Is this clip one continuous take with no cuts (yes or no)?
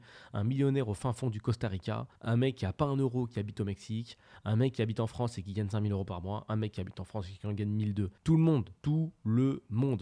no